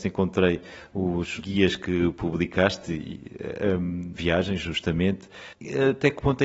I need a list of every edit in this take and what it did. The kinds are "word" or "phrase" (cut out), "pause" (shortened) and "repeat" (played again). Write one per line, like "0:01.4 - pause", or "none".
0:01.4 - word
0:04.1 - word